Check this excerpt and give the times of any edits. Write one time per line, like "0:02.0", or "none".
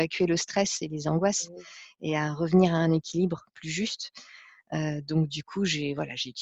none